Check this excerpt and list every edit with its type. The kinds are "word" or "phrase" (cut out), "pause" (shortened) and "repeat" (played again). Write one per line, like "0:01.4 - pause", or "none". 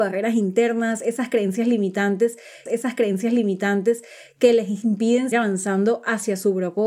0:02.7 - repeat
0:05.3 - word